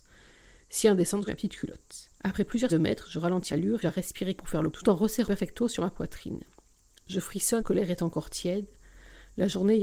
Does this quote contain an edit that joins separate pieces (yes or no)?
yes